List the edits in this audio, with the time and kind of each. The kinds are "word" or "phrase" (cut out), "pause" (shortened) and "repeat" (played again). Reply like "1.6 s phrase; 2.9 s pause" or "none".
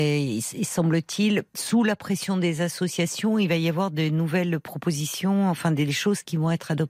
1.5 s pause